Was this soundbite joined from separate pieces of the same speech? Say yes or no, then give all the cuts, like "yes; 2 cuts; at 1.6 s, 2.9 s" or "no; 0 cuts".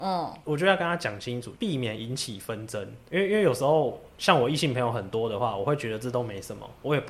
yes; 1 cut; at 3.1 s